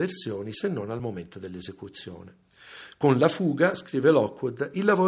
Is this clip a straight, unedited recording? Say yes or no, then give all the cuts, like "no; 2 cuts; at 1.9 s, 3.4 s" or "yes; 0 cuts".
yes; 0 cuts